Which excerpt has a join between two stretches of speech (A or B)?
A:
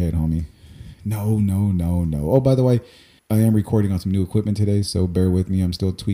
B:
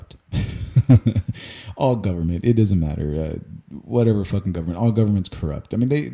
A